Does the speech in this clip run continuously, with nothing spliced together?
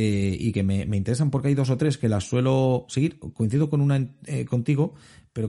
yes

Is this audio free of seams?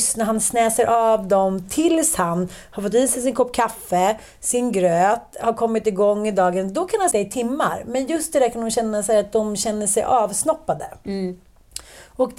no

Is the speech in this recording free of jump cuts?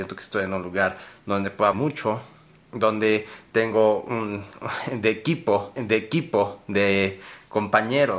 no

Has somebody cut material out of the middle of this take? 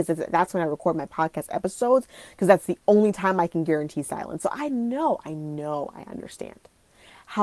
no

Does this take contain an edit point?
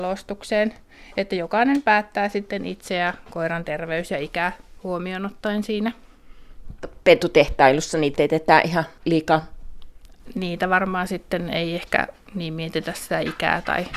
yes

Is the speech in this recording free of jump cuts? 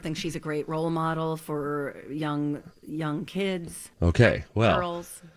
no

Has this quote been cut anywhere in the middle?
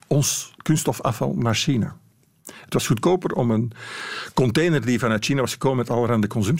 no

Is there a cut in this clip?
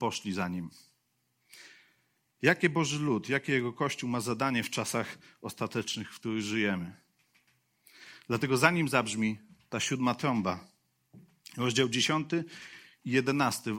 no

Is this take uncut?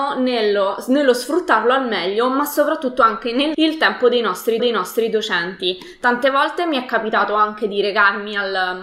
no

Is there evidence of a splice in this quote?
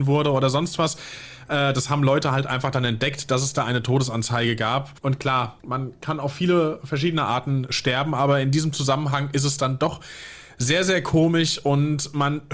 yes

